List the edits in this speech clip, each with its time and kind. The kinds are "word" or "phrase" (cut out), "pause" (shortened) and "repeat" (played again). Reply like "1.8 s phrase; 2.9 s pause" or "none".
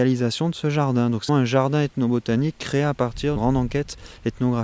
1.3 s word; 3.4 s word